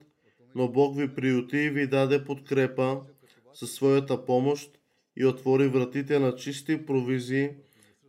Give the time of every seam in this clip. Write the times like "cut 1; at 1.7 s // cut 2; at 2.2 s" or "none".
none